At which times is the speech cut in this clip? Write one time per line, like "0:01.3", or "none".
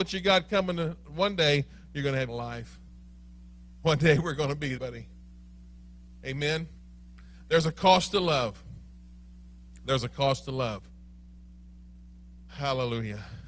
0:02.3
0:04.8